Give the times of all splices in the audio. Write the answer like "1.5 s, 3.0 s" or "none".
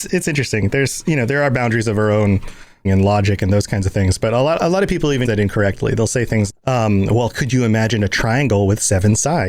2.8 s, 5.2 s, 6.5 s